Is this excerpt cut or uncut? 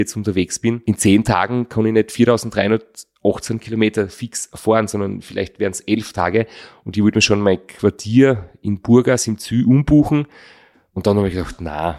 uncut